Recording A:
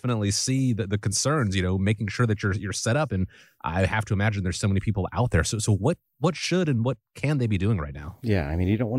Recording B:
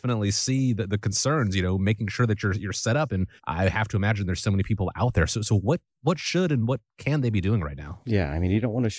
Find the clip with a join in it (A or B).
B